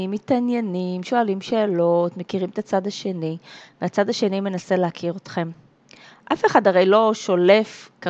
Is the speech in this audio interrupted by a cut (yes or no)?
no